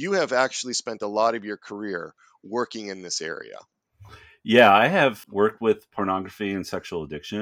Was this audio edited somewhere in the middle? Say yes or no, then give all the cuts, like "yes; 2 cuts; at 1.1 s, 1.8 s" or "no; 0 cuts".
no; 0 cuts